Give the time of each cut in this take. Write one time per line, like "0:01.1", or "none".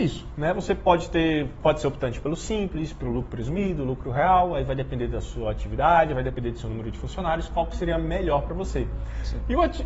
none